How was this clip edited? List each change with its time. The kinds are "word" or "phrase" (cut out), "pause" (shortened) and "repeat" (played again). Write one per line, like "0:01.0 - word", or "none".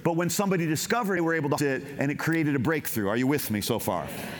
0:01.2 - phrase
0:01.6 - word